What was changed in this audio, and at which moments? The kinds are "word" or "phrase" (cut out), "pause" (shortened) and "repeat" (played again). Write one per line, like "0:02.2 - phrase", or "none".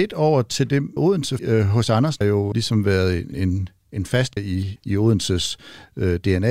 0:01.0 - word
0:01.4 - word
0:02.2 - word
0:02.5 - word
0:03.3 - word
0:04.4 - word
0:04.8 - word